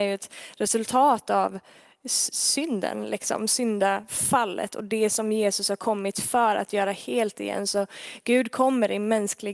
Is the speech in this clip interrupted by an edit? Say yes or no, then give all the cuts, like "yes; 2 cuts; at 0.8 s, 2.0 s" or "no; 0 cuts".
no; 0 cuts